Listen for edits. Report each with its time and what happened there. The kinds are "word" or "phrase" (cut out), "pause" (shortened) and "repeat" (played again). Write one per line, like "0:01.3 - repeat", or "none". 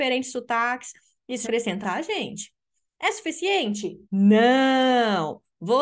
0:01.4 - word
0:01.8 - word
0:04.0 - pause